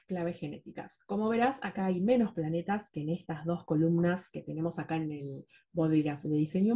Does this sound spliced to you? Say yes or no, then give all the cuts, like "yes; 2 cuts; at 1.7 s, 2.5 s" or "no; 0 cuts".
no; 0 cuts